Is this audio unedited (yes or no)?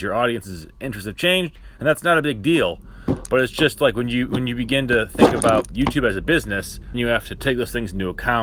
no